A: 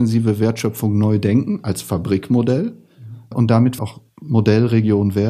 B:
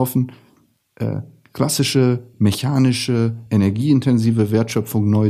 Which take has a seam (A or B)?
A